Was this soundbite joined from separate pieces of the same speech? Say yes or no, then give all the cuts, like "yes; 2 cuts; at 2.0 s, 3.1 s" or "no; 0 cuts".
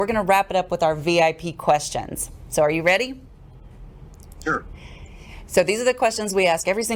no; 0 cuts